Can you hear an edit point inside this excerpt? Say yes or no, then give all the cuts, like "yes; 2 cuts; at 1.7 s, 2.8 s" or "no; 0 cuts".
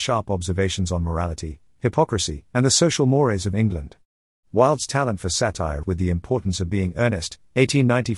yes; 3 cuts; at 2.5 s, 3.5 s, 5.8 s